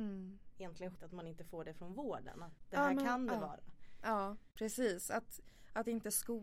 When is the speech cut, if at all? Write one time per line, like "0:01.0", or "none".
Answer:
0:01.0